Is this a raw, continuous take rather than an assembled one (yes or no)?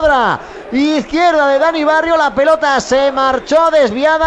yes